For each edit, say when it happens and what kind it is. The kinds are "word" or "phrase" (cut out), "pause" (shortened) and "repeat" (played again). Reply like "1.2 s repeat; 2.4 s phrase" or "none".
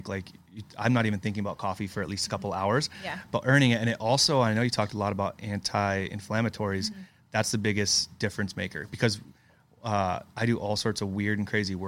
none